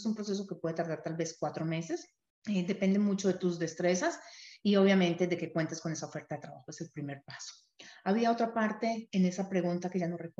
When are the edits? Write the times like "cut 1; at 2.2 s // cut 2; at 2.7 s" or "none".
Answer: cut 1; at 2.3 s